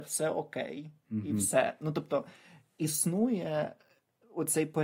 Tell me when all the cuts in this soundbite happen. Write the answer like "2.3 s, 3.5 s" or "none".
none

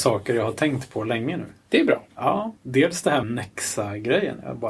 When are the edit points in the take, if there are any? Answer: 2.6 s, 3.2 s

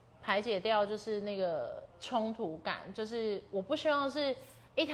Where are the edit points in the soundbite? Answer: 1.9 s

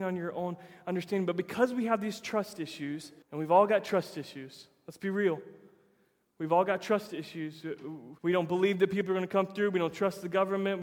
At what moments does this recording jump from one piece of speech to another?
3.2 s, 8.2 s

